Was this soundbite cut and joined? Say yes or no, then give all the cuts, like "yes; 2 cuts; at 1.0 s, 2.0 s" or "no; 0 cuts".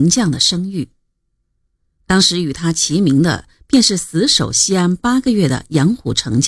no; 0 cuts